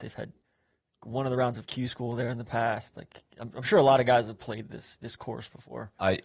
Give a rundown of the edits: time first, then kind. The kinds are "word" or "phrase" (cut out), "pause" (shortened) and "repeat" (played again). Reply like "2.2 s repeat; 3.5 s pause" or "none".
none